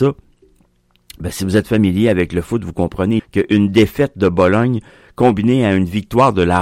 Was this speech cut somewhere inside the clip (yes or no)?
yes